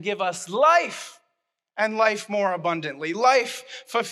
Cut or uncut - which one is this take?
uncut